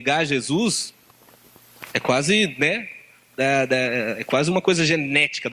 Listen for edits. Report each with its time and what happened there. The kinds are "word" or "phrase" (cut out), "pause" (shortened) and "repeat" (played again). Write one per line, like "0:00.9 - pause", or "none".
none